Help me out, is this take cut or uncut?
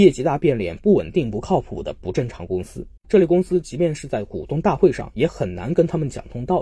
cut